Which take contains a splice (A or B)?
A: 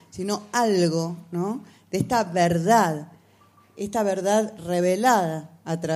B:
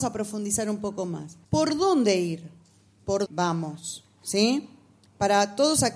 B